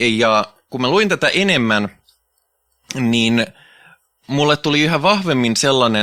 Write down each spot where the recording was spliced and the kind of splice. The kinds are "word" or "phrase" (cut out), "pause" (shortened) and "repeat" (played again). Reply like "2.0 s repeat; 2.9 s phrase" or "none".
none